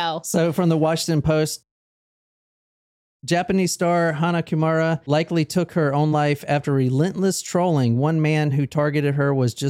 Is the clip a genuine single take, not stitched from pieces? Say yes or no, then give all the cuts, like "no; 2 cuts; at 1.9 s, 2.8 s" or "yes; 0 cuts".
yes; 0 cuts